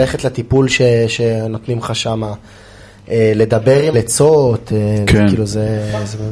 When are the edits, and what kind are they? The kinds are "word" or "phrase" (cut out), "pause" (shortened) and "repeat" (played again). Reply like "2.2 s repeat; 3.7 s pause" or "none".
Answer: 3.9 s phrase